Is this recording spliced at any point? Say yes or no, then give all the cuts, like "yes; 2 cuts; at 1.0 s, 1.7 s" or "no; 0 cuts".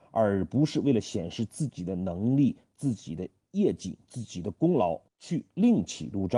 yes; 1 cut; at 5.1 s